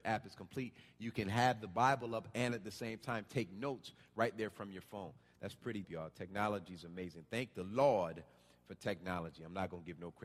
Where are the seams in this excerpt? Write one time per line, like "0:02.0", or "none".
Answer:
0:05.8